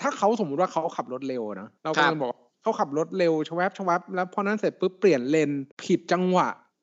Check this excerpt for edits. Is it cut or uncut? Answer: cut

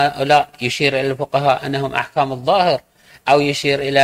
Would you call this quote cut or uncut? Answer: uncut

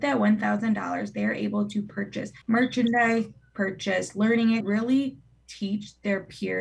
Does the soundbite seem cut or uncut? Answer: cut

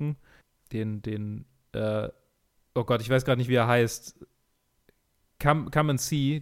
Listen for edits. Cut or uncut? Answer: uncut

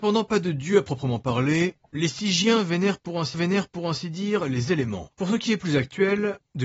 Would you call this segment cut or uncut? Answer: cut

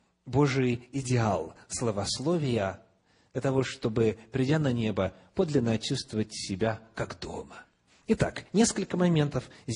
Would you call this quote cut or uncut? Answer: uncut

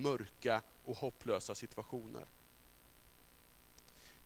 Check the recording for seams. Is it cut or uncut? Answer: uncut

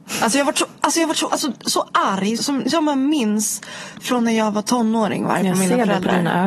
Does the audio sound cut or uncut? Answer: cut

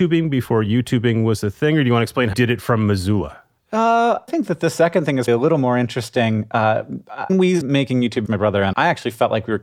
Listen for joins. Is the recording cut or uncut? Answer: cut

